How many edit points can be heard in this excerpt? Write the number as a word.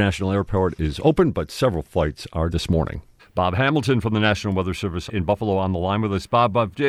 three